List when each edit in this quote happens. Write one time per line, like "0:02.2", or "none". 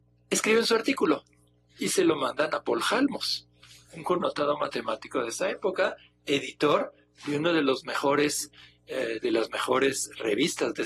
none